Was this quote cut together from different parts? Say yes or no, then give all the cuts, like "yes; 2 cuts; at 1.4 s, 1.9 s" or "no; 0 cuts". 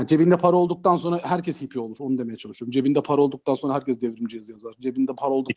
no; 0 cuts